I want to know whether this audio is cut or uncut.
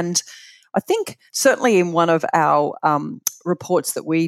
cut